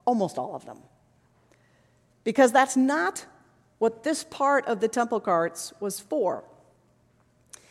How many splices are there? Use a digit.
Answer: 0